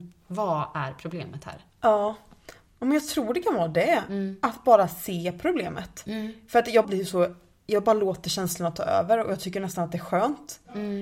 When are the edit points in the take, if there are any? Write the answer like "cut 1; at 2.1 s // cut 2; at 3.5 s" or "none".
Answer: cut 1; at 6.8 s